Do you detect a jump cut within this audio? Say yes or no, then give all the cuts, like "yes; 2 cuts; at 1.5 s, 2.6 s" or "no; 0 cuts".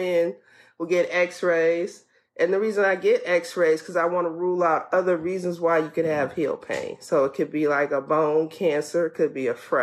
no; 0 cuts